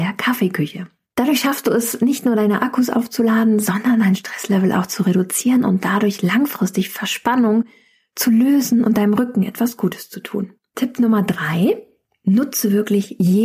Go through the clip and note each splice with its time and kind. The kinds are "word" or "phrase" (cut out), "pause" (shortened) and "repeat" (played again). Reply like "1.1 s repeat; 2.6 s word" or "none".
none

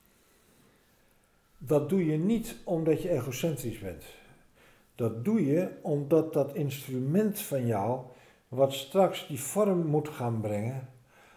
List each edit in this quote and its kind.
none

